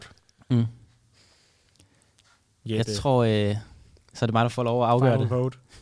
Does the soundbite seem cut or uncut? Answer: uncut